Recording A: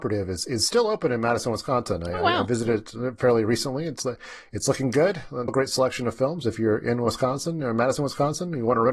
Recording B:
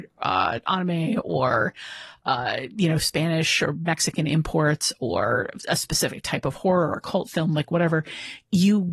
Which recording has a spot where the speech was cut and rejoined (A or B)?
A